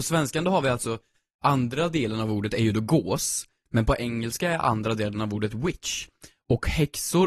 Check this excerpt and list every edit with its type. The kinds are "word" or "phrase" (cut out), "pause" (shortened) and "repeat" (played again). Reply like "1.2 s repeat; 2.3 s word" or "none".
none